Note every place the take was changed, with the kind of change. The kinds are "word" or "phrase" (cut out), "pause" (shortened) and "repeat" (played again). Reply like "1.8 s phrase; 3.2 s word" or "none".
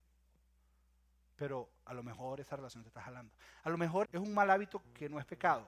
4.0 s word